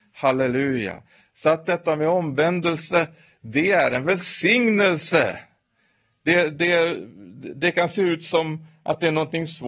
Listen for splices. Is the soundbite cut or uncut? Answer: uncut